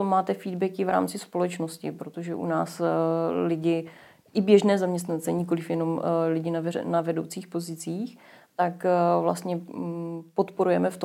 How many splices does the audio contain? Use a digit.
0